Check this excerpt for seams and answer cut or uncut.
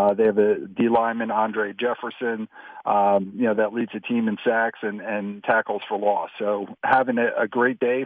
uncut